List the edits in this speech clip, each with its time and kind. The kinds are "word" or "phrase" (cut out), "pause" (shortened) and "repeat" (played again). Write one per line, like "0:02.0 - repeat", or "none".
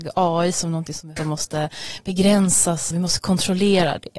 0:01.2 - word
0:02.9 - word